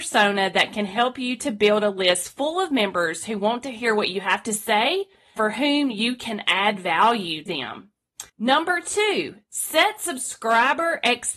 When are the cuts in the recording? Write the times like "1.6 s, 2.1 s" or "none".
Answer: 5.4 s, 7.5 s, 8.3 s